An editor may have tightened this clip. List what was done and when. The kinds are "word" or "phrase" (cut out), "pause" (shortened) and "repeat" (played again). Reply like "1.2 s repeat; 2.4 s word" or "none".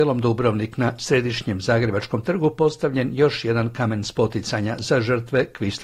none